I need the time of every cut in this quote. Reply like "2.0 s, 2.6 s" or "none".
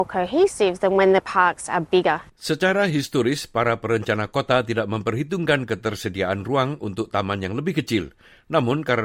2.3 s